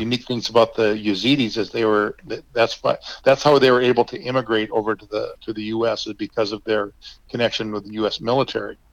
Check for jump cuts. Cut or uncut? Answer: cut